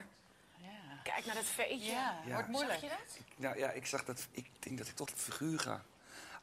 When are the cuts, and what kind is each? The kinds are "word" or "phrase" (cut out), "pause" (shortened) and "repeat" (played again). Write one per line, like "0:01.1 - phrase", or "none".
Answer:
0:05.1 - word